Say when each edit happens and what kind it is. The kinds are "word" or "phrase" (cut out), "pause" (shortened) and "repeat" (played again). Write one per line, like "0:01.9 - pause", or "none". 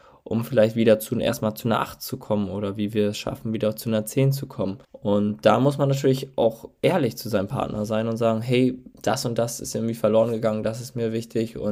0:04.8 - pause
0:08.9 - pause